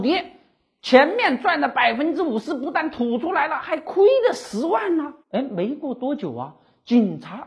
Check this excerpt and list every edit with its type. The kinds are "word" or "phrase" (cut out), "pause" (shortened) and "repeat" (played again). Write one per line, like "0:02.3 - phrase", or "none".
0:05.2 - pause